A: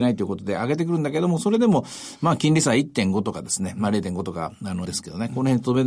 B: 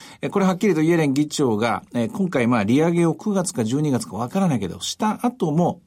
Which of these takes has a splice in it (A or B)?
A